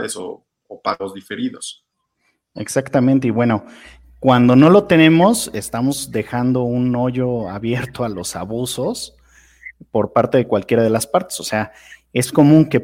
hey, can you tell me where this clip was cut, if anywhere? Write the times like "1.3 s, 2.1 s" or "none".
none